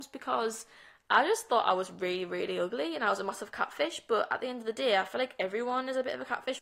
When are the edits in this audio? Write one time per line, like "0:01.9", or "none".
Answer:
none